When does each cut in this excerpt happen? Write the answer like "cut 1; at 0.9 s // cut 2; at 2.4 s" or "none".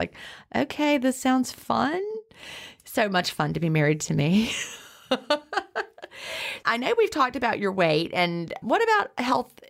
cut 1; at 6.6 s // cut 2; at 8.6 s